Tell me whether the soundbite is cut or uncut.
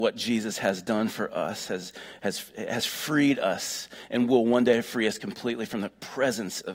uncut